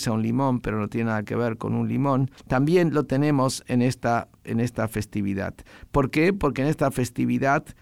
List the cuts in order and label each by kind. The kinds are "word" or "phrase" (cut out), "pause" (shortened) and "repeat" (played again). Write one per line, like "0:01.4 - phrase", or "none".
0:02.4 - pause

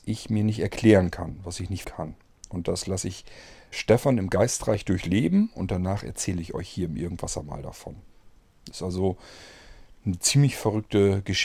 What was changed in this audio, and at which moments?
0:01.8 - word
0:03.7 - word

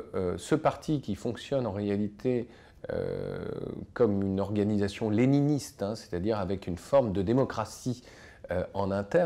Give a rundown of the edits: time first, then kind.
none

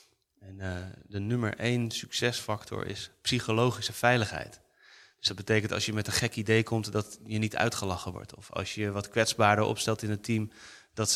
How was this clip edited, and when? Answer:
none

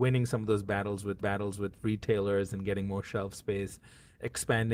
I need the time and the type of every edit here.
0:01.2 - repeat

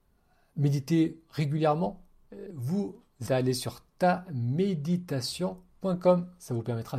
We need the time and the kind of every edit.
0:02.5 - word
0:03.3 - word

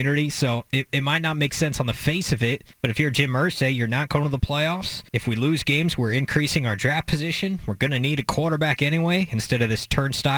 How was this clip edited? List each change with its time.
0:02.7 - pause
0:05.1 - pause

